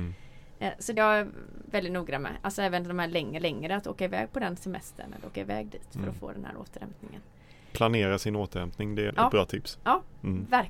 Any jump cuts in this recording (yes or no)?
yes